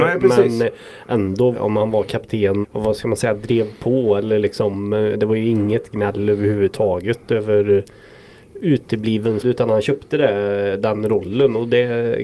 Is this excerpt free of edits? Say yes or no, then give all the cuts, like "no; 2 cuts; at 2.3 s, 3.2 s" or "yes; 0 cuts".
no; 3 cuts; at 1.5 s, 2.6 s, 9.4 s